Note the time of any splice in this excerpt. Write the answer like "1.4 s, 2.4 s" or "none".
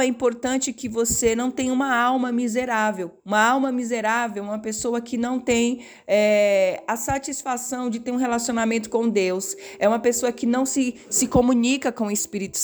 3.2 s